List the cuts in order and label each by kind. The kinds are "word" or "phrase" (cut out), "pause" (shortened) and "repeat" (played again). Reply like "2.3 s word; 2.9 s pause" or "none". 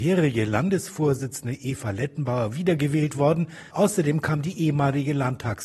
3.7 s pause